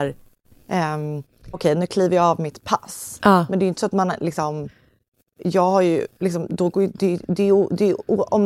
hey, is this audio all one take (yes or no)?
no